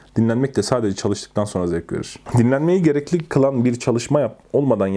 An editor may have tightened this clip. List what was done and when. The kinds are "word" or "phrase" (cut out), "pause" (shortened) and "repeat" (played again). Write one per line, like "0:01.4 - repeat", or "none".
none

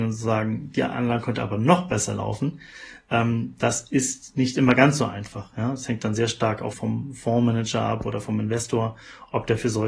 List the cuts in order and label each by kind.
0:06.7 - word

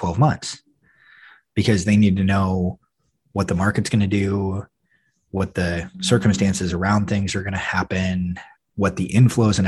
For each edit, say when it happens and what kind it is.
none

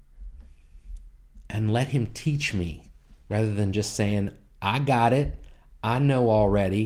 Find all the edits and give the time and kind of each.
none

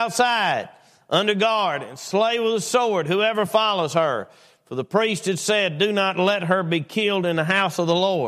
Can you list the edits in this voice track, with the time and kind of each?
none

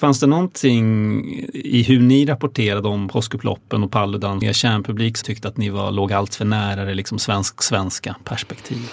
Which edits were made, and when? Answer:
0:04.4 - word
0:05.2 - phrase

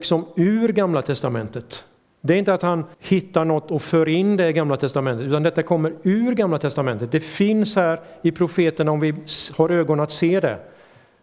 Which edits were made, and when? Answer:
0:02.0 - pause
0:02.9 - pause

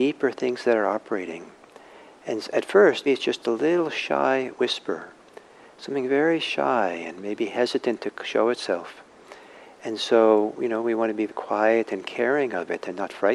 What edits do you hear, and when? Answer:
0:03.1 - word
0:11.3 - word

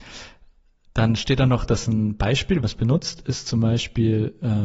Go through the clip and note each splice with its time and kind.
0:02.6 - phrase

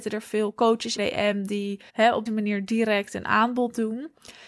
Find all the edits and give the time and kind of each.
0:01.0 - phrase
0:01.9 - pause
0:02.3 - word

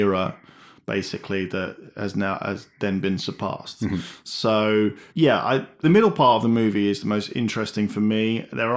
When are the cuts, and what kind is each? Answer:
0:05.1 - pause
0:05.8 - phrase

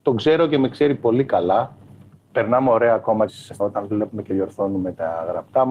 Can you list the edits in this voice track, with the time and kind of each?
0:03.3 - phrase
0:03.6 - word

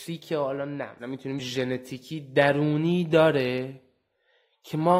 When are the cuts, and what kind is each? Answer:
0:01.0 - word
0:01.4 - word

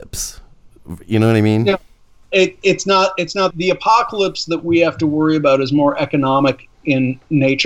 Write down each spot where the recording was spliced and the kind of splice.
0:03.5 - word

